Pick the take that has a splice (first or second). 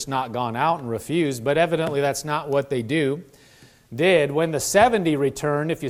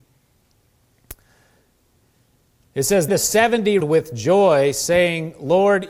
second